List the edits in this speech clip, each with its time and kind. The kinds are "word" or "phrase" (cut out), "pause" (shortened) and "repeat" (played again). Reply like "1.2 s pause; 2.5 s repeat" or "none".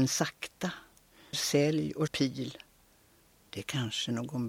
1.3 s word; 2.1 s word